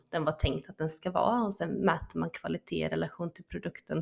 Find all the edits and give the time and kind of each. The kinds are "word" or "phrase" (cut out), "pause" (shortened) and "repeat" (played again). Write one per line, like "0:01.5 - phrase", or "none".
none